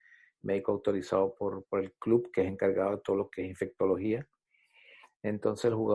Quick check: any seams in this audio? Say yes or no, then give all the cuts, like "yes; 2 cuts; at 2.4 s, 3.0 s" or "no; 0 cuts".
no; 0 cuts